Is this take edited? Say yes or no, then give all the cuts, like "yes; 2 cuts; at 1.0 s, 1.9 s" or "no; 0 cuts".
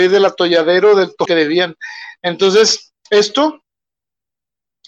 yes; 1 cut; at 1.2 s